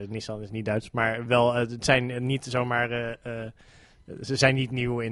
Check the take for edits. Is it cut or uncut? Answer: uncut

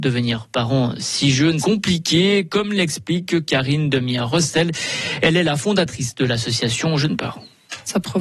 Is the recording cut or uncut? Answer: cut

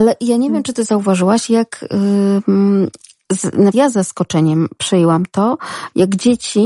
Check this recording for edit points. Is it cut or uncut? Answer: cut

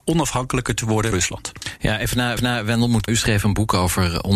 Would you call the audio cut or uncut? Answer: cut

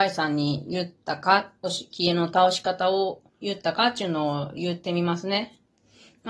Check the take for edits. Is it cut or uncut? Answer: cut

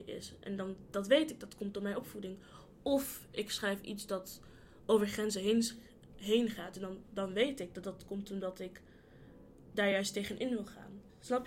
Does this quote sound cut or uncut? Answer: uncut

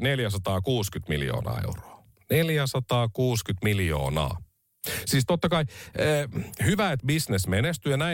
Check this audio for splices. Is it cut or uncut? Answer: uncut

